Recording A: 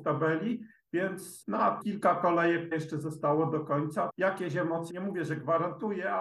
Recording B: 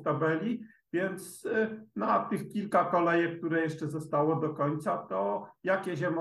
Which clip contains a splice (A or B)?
A